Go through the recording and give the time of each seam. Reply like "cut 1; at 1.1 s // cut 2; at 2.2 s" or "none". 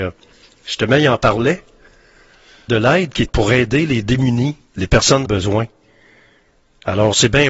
cut 1; at 2.7 s // cut 2; at 3.3 s // cut 3; at 4.7 s // cut 4; at 5.3 s